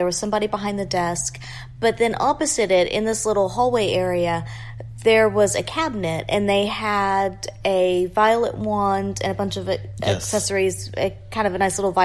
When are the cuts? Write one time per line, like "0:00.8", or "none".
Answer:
none